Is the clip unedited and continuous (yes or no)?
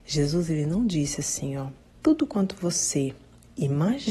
yes